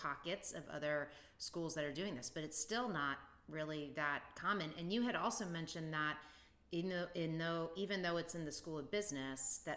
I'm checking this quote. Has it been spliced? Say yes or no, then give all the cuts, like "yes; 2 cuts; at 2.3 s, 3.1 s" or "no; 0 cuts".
no; 0 cuts